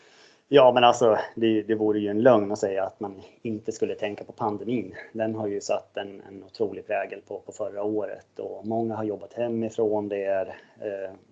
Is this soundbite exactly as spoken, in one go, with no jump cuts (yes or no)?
yes